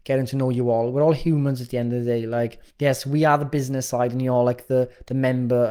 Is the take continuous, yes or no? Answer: no